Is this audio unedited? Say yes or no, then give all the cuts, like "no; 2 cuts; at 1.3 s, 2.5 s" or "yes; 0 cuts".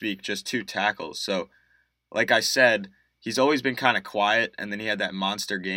yes; 0 cuts